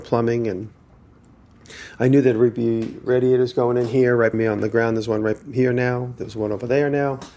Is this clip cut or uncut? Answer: cut